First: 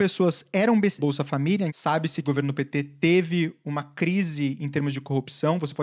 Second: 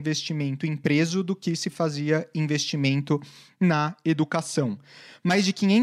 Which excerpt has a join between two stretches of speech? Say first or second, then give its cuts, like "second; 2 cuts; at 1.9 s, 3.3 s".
first; 3 cuts; at 1.0 s, 1.7 s, 2.2 s